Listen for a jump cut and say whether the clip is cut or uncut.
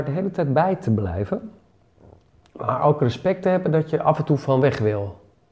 uncut